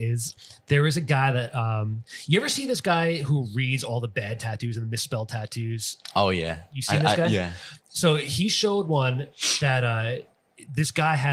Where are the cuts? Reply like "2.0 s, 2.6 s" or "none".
none